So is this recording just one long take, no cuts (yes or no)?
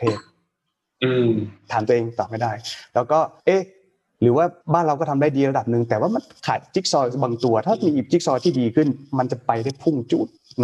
no